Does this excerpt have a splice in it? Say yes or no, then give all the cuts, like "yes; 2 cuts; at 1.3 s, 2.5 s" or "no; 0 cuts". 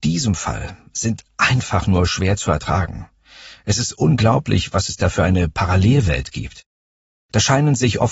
no; 0 cuts